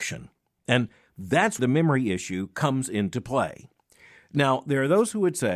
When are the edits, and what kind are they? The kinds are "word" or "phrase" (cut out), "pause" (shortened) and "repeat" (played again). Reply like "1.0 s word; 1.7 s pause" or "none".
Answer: 1.6 s word